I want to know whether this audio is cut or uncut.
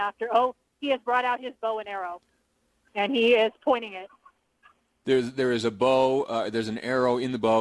cut